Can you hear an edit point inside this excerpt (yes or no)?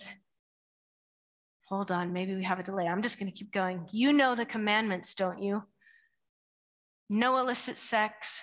no